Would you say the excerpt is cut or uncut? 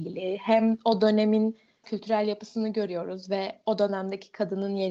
cut